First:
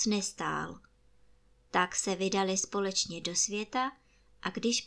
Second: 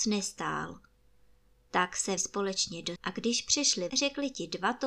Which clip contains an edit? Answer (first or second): second